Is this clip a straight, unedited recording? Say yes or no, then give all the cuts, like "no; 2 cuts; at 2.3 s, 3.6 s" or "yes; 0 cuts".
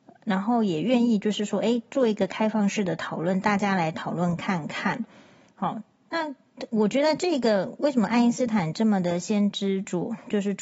yes; 0 cuts